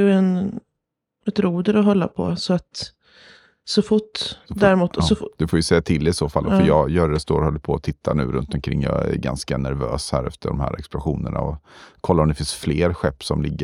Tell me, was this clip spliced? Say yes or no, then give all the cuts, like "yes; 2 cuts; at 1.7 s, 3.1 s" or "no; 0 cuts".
no; 0 cuts